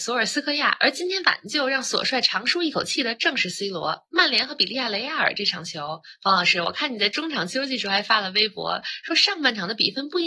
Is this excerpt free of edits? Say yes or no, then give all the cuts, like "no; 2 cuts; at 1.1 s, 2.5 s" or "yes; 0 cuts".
yes; 0 cuts